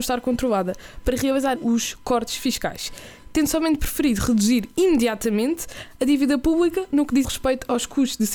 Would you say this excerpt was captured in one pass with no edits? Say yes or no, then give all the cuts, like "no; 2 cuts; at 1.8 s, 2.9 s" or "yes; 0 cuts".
no; 2 cuts; at 1.5 s, 7.2 s